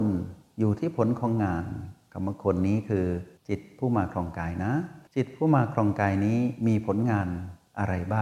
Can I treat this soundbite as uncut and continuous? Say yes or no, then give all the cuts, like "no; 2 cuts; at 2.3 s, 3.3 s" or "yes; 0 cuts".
no; 2 cuts; at 3.4 s, 5.1 s